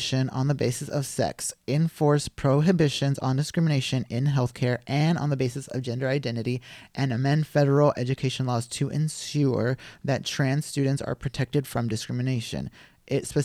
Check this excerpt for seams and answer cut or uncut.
uncut